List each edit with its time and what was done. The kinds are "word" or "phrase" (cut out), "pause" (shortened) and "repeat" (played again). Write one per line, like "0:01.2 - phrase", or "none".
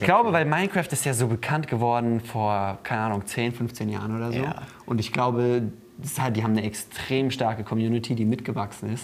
none

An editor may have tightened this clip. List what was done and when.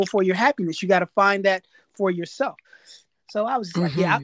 none

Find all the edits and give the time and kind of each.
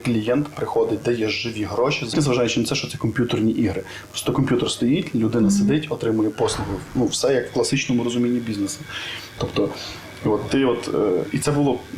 0:02.1 - phrase

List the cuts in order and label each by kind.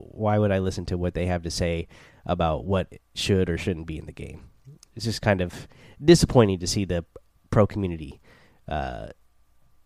none

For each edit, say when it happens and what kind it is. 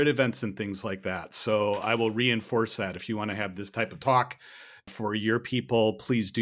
0:04.9 - word

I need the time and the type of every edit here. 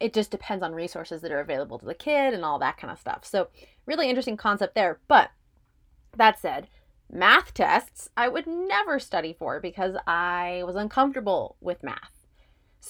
none

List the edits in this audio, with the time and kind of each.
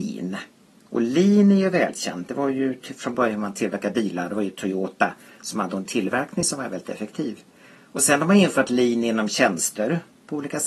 none

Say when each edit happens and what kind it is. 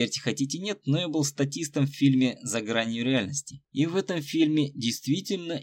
none

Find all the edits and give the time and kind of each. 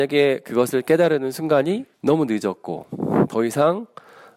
0:01.9 - pause

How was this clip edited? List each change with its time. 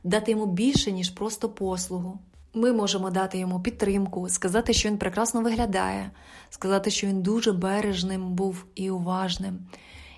0:02.5 - pause

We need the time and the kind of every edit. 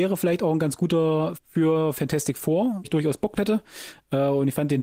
0:01.3 - word
0:01.9 - word
0:02.8 - word
0:03.4 - word

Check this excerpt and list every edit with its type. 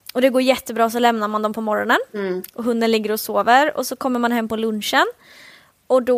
none

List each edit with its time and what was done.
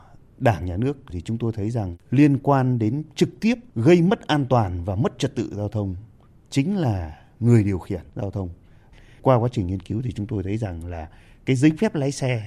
none

